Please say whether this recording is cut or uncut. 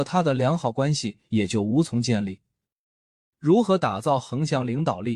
uncut